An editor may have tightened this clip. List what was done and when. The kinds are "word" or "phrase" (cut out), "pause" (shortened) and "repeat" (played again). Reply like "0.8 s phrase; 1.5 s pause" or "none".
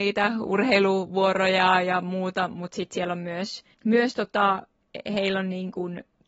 3.7 s pause